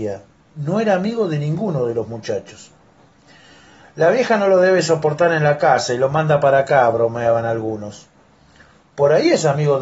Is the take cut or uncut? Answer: uncut